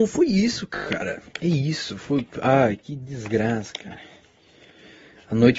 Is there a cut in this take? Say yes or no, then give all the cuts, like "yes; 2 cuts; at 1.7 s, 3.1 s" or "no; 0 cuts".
no; 0 cuts